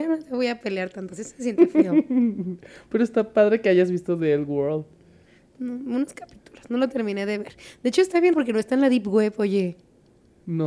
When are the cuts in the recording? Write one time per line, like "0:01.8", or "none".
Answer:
0:08.3